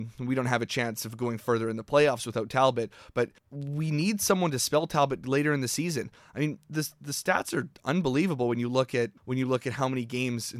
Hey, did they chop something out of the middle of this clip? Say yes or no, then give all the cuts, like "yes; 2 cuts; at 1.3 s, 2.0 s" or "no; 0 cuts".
yes; 2 cuts; at 3.4 s, 9.2 s